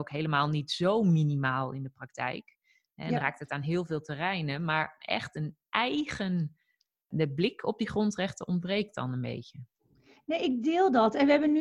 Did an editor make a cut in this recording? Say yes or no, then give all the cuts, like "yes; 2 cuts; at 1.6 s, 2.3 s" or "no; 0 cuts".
no; 0 cuts